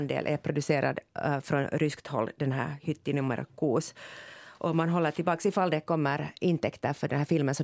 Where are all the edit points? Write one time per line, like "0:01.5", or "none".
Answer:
none